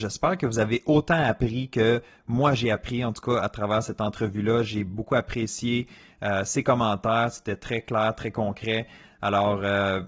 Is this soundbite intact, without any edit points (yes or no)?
yes